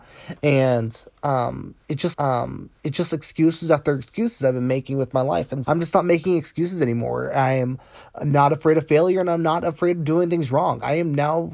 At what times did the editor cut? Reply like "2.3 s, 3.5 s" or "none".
2.1 s, 5.6 s

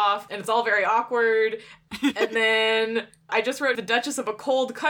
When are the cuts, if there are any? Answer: 3.3 s, 3.8 s

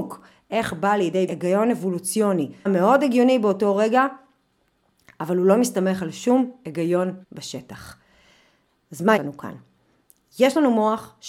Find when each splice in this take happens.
1.3 s, 2.7 s, 7.2 s, 9.2 s

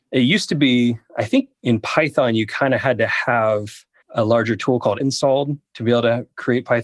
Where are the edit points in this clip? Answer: 1.5 s, 4.0 s, 5.0 s

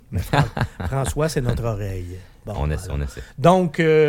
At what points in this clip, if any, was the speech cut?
none

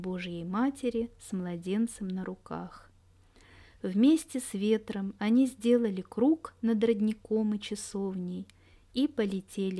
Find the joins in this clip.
none

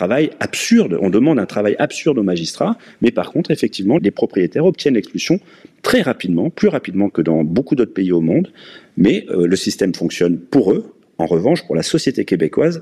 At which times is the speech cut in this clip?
4.0 s

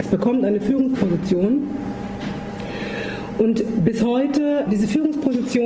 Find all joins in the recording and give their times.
none

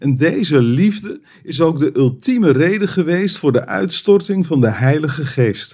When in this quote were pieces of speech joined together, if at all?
none

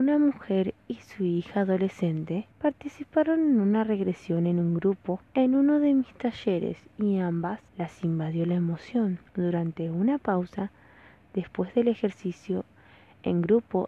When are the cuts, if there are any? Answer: 2.5 s, 5.3 s, 7.7 s, 9.3 s

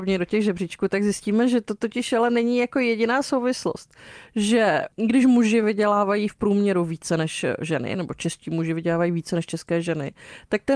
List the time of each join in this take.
none

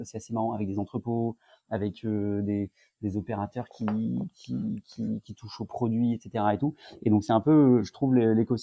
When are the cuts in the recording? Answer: none

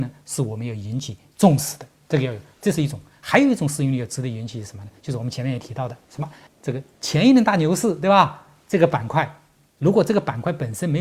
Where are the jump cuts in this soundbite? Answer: 6.5 s

